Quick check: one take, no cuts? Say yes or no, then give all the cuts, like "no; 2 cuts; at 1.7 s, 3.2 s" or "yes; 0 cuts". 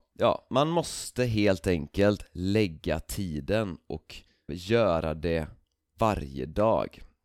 no; 1 cut; at 4.5 s